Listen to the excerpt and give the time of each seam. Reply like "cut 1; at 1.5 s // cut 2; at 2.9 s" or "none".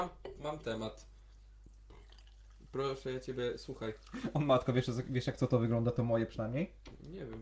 none